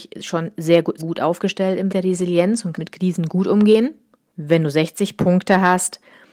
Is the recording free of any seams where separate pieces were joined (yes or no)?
no